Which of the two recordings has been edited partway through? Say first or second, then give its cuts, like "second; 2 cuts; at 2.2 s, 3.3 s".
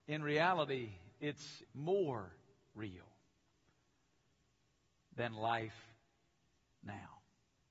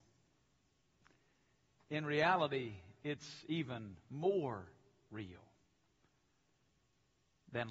first; 1 cut; at 1.6 s